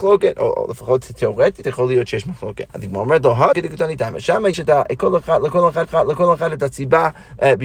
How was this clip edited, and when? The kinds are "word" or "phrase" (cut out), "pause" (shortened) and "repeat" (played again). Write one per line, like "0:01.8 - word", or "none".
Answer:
0:02.7 - pause
0:03.5 - word
0:04.5 - word
0:05.8 - repeat